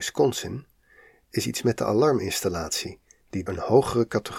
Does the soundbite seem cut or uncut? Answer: cut